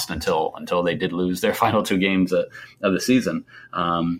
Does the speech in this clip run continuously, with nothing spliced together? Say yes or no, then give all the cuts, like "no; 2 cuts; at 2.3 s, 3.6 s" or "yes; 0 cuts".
yes; 0 cuts